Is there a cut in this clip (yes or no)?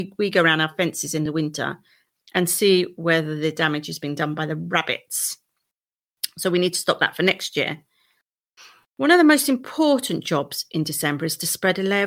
no